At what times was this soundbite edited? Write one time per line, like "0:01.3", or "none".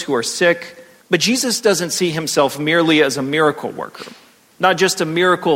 0:01.0